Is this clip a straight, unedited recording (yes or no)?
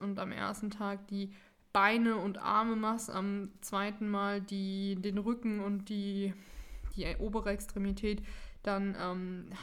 yes